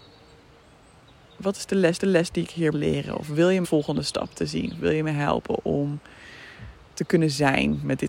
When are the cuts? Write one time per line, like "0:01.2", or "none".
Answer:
0:02.0
0:02.7
0:03.6